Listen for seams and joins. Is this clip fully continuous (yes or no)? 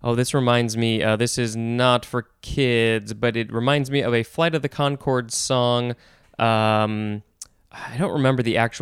yes